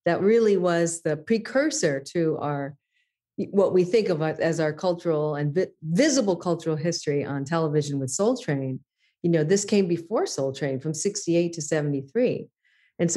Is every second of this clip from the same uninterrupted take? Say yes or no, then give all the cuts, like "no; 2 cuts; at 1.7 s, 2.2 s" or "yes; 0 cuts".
yes; 0 cuts